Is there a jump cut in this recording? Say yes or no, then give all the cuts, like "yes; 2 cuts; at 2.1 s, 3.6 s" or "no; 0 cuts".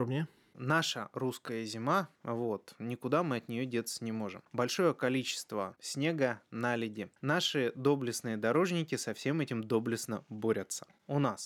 yes; 1 cut; at 2.2 s